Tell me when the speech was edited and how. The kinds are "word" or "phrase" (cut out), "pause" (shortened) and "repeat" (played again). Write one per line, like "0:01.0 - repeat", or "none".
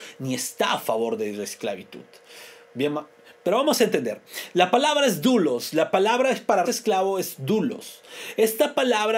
0:06.7 - word